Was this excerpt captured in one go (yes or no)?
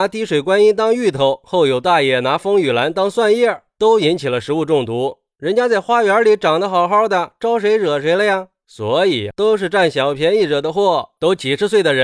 no